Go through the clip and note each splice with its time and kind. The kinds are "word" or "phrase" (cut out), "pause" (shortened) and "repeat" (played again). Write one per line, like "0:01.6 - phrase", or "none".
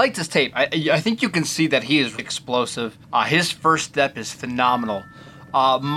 0:02.2 - word
0:03.0 - pause